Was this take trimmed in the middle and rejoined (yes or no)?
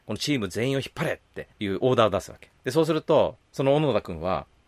yes